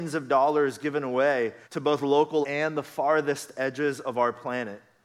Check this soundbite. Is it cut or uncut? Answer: cut